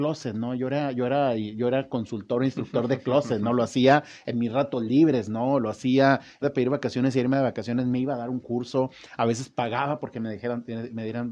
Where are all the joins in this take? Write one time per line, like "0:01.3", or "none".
0:06.4